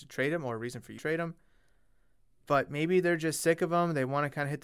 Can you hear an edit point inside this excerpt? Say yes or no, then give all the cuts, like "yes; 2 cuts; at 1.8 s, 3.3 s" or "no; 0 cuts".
yes; 1 cut; at 1.0 s